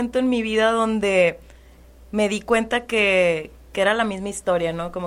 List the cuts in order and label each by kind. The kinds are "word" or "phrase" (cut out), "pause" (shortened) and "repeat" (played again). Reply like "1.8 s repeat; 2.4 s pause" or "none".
none